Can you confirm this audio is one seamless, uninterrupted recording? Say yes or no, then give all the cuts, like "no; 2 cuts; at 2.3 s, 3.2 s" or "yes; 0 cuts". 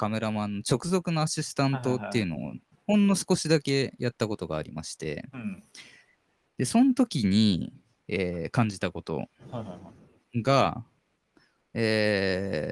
yes; 0 cuts